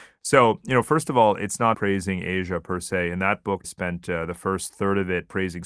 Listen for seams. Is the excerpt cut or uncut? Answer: cut